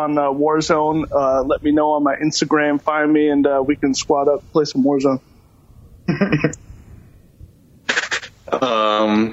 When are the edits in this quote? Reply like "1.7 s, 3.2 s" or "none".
none

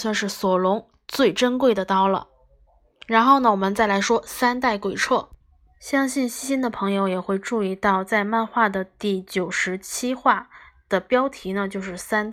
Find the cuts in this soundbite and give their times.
none

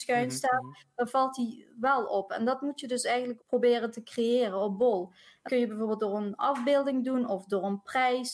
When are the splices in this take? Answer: 3.4 s, 5.5 s

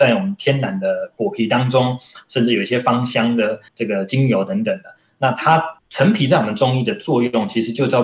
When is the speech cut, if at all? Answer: 3.7 s, 5.8 s

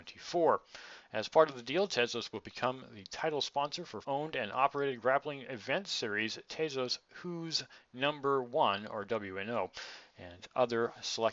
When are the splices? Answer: 4.0 s

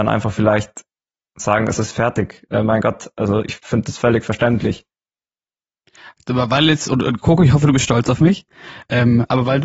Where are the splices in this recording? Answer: none

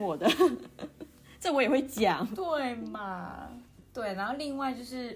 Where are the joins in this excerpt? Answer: none

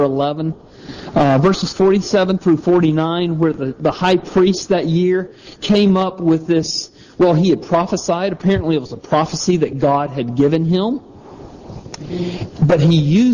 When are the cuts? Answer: none

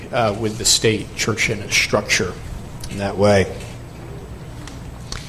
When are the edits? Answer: none

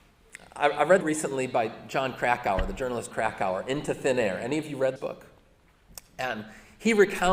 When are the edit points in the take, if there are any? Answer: 1.0 s, 3.1 s, 5.0 s

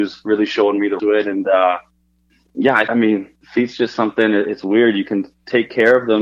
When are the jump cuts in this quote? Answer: 1.0 s, 2.9 s

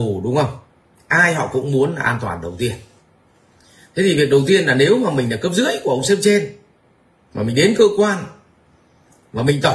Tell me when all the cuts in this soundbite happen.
none

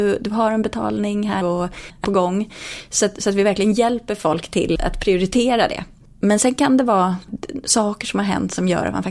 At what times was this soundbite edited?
1.4 s, 2.0 s, 4.8 s

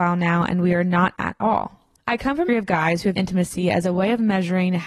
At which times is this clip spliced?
1.2 s, 2.0 s, 2.5 s, 3.1 s

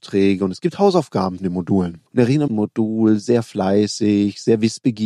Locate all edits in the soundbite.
1.4 s, 2.1 s, 2.5 s

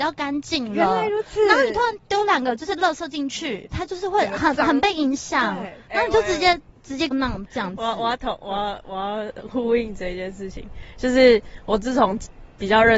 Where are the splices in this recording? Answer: 3.7 s, 7.1 s

